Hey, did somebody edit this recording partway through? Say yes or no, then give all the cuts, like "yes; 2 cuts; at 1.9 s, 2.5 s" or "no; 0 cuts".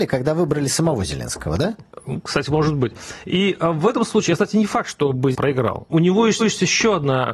yes; 3 cuts; at 5.3 s, 5.9 s, 6.4 s